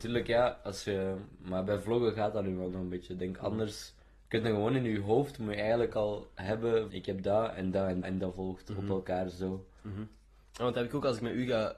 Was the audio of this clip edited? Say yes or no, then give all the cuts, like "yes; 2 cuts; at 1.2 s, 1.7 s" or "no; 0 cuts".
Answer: yes; 3 cuts; at 4.0 s, 6.9 s, 8.0 s